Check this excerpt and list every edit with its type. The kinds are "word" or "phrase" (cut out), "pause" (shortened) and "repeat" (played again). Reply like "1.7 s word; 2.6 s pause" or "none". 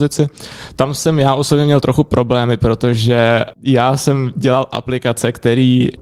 none